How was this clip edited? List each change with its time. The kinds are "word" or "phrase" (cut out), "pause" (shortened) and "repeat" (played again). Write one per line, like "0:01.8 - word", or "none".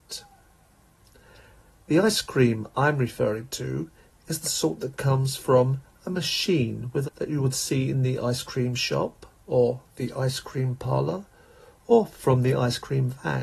0:07.0 - phrase